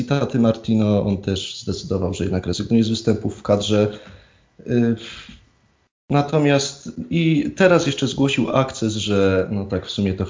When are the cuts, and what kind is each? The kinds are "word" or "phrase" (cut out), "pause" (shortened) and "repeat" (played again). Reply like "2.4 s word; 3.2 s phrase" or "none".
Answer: none

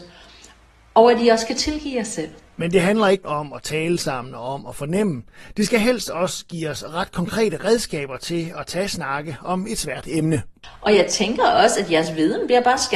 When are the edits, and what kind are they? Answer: 3.2 s word

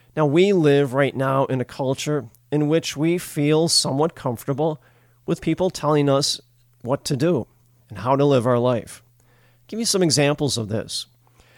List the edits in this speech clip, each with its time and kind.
none

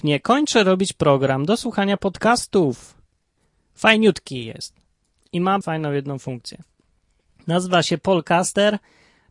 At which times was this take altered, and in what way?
5.6 s word

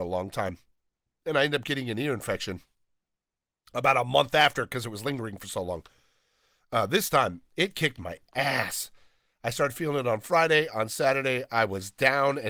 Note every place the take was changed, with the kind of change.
none

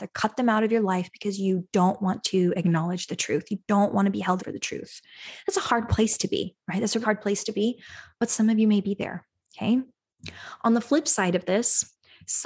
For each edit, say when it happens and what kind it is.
4.4 s word; 7.0 s word

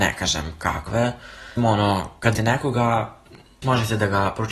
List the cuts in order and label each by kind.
1.6 s word; 2.3 s word; 3.6 s word

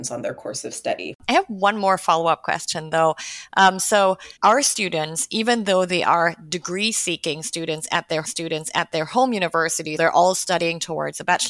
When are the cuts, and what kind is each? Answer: 1.2 s pause; 4.4 s pause; 8.2 s repeat; 10.0 s word

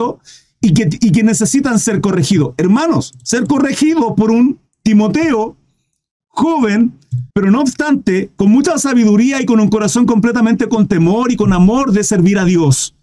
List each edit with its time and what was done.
7.3 s pause

